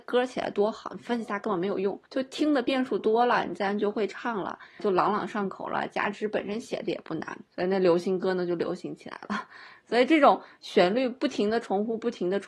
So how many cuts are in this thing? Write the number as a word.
three